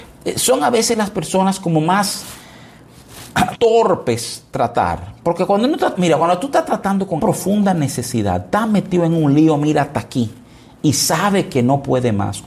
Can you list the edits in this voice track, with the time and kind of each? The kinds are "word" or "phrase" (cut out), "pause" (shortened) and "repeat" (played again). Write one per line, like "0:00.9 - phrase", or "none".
0:03.5 - word
0:05.9 - word
0:07.2 - phrase